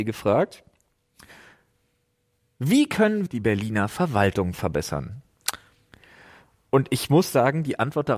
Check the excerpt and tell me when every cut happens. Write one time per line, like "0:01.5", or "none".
0:03.3